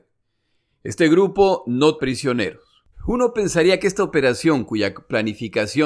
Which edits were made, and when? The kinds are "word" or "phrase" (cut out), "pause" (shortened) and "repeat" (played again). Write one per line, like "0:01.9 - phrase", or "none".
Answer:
0:02.0 - word
0:02.9 - pause